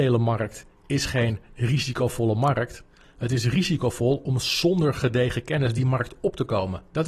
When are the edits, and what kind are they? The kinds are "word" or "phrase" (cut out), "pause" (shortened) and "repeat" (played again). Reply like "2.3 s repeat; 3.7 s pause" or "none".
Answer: none